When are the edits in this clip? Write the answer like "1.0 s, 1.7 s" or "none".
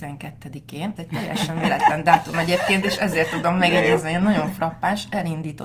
1.0 s

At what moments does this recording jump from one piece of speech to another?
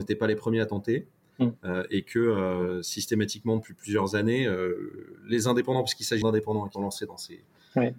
6.2 s, 6.7 s

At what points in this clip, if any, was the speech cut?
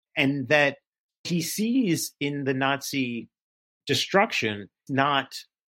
1.2 s, 4.9 s

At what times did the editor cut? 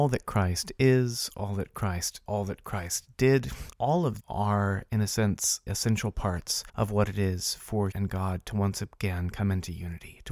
2.3 s, 3.7 s, 4.2 s, 5.7 s, 6.7 s, 7.9 s

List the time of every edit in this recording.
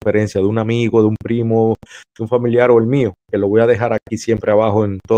none

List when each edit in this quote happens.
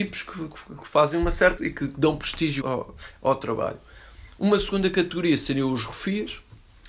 1.6 s, 2.6 s

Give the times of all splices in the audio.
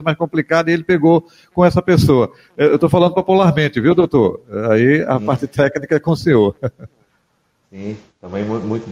none

